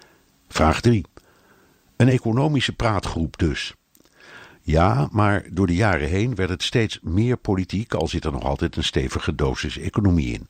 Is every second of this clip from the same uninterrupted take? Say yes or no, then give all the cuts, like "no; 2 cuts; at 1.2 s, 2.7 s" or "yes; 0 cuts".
yes; 0 cuts